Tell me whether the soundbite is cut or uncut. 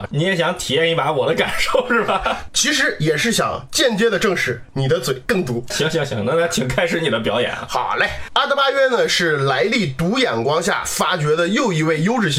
cut